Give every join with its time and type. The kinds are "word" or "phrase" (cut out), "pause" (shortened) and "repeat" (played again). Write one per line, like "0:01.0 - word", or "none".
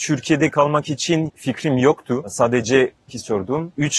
0:01.3 - word
0:03.1 - word